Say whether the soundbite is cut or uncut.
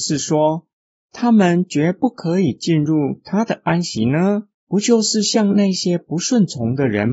cut